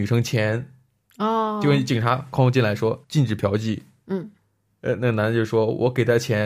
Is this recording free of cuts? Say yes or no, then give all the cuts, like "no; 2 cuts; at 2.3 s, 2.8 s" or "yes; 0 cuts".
no; 2 cuts; at 3.0 s, 4.7 s